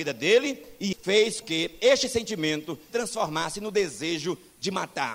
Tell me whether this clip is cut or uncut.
cut